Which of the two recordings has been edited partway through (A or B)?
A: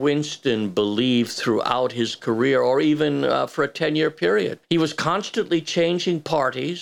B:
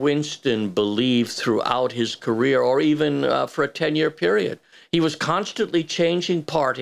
A